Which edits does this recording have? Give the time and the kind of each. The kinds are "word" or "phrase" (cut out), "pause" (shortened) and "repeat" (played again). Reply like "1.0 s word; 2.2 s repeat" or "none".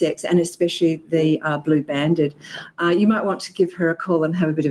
none